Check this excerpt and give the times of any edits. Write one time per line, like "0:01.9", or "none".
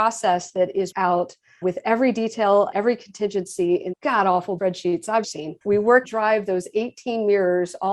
0:00.9
0:01.6
0:02.7
0:03.9
0:04.6
0:05.2
0:05.6
0:06.0